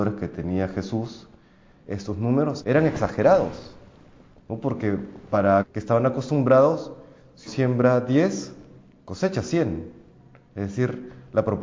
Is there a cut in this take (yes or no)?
yes